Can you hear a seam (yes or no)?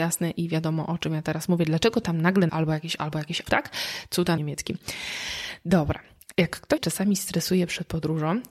yes